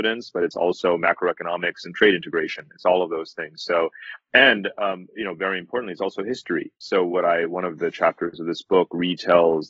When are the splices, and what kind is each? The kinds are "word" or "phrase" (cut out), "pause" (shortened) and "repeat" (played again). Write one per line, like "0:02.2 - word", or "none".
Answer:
0:06.8 - pause

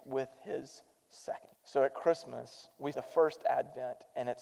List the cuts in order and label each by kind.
0:01.6 - pause
0:02.9 - word

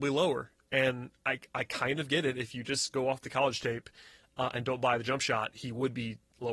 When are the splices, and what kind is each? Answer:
0:01.2 - pause

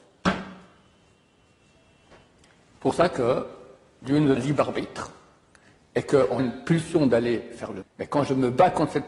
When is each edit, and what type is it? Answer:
0:04.4 - word
0:06.4 - word
0:07.8 - word

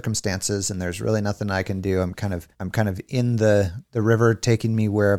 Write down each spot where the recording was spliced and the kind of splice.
0:02.5 - pause

